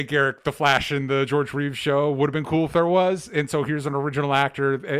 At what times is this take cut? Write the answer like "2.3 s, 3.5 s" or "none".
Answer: none

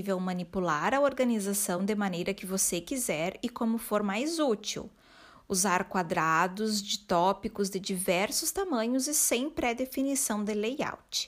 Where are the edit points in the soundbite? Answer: none

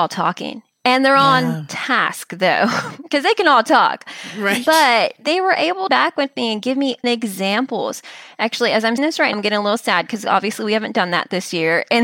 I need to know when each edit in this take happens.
5.9 s, 7.0 s, 9.0 s, 9.3 s

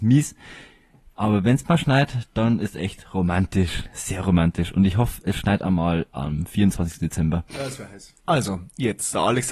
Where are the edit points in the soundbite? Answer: 8.2 s

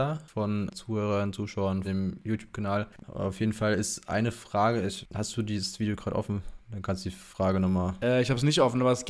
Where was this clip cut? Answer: 1.8 s

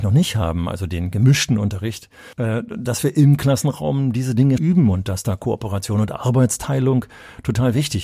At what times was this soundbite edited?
2.3 s, 4.6 s

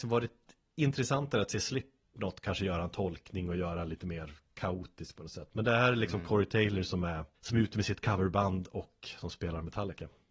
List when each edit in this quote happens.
7.4 s

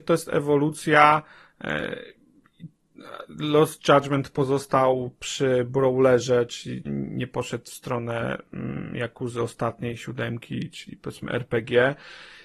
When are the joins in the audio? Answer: 6.9 s

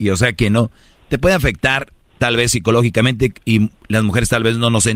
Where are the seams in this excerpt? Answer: none

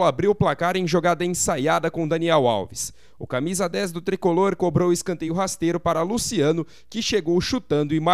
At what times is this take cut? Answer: none

